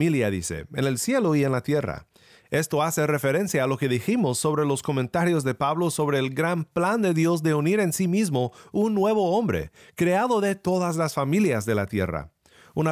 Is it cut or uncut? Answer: uncut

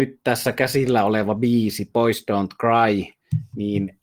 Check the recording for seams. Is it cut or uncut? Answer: uncut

